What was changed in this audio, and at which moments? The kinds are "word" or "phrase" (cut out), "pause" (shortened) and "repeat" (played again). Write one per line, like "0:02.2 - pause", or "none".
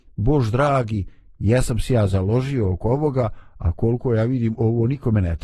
none